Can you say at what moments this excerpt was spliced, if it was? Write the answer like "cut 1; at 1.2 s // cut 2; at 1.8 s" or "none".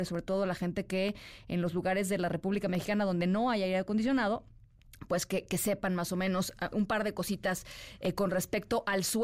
cut 1; at 6.7 s